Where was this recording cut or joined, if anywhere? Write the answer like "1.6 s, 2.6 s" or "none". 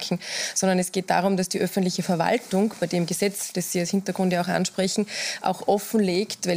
none